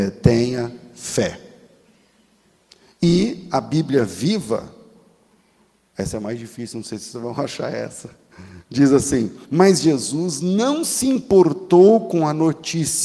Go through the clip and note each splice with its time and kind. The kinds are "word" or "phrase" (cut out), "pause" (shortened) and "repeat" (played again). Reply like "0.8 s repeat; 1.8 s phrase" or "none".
9.4 s pause